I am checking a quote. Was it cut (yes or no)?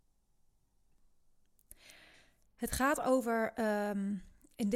no